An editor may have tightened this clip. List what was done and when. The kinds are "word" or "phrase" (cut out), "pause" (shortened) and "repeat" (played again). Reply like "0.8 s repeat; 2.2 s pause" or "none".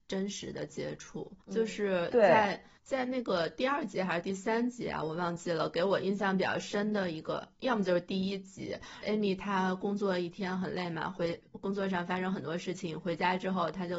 1.4 s pause; 2.8 s pause; 9.0 s phrase